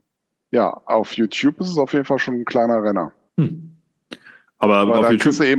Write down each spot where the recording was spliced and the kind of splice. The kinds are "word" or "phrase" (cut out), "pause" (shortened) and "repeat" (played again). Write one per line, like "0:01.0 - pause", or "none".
0:03.3 - pause